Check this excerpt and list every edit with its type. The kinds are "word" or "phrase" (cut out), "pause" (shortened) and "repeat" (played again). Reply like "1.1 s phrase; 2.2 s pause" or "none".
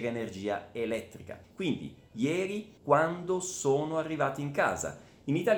1.4 s pause; 2.8 s pause